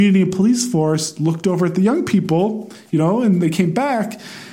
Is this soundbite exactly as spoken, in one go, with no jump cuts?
yes; 0 cuts

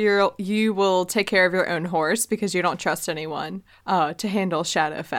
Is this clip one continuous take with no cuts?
yes; 0 cuts

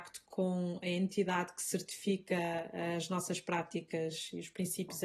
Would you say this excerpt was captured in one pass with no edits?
yes; 0 cuts

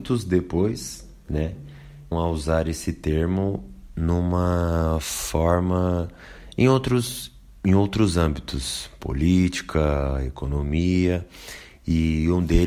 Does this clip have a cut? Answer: yes; 1 cut; at 2.1 s

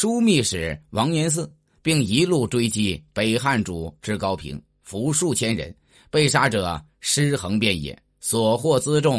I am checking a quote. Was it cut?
no; 0 cuts

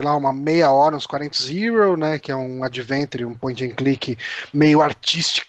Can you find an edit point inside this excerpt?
yes; 1 cut; at 1.3 s

